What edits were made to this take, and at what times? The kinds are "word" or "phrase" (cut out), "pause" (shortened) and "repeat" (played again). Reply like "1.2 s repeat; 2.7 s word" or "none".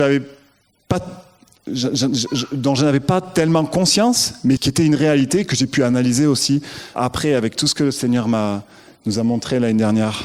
1.7 s word; 4.6 s word; 6.9 s word